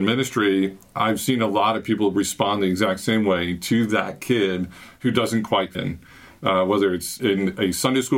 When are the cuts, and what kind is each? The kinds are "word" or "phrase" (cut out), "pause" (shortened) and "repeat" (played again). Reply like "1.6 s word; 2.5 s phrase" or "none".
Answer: 5.7 s word; 7.2 s word